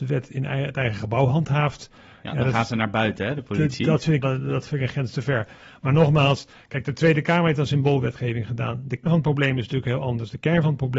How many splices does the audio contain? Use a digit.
2